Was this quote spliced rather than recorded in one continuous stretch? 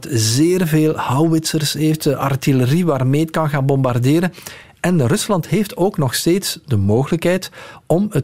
no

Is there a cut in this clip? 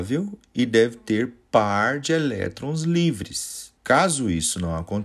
yes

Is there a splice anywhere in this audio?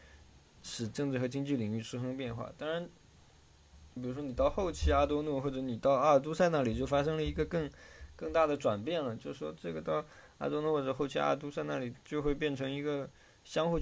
yes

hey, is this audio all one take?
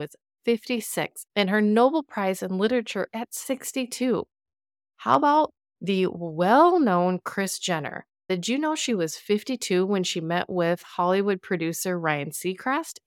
yes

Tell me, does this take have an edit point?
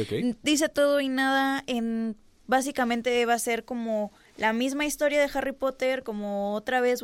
no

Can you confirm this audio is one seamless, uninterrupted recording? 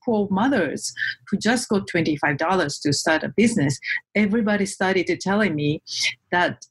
yes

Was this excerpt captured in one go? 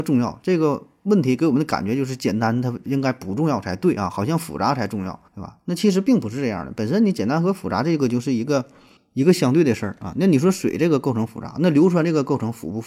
no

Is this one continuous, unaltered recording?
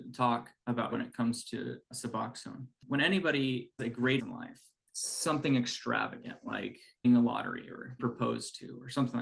no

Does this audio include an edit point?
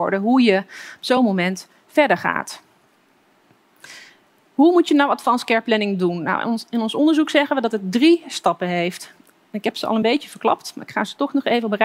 no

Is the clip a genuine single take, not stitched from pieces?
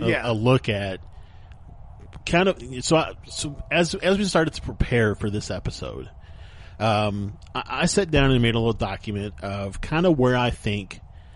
yes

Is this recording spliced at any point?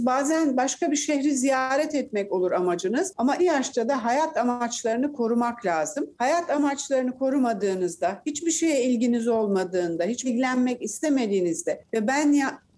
yes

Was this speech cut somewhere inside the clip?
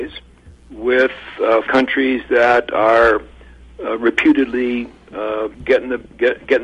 yes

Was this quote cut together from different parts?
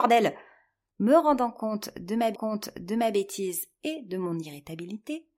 yes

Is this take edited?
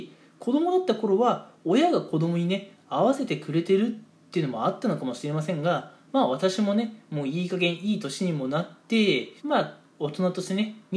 yes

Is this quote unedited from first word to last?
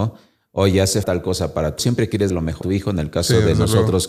no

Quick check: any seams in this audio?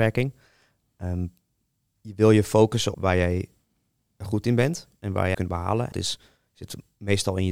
yes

